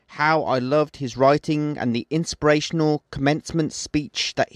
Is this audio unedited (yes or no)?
yes